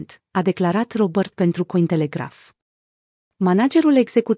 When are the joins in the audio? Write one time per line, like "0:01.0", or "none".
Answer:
0:01.3